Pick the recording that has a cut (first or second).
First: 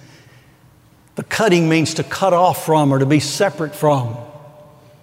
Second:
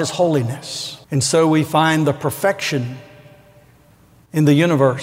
second